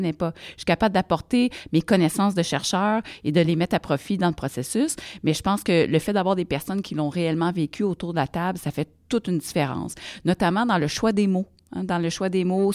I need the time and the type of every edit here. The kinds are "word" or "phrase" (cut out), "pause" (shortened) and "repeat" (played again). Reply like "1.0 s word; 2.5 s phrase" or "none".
none